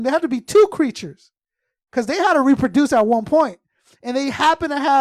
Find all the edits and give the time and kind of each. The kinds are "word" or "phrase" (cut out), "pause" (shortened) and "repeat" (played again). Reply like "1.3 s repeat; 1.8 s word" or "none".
none

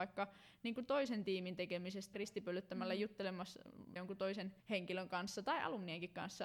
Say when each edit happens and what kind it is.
2.1 s word; 4.0 s word; 4.6 s pause

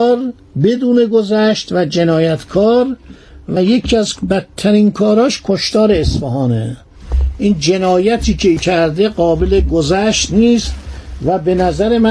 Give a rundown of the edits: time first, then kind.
none

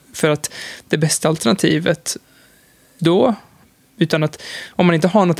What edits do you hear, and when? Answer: 3.0 s word

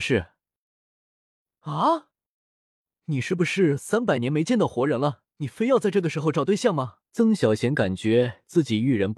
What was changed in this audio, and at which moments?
5.3 s pause; 7.1 s pause

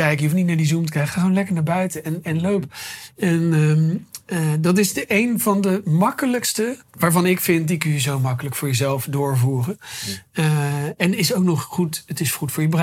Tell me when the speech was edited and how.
6.8 s pause

